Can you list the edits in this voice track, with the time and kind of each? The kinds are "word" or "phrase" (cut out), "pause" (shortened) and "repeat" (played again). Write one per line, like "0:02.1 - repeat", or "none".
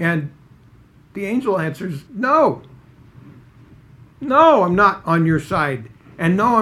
0:02.1 - pause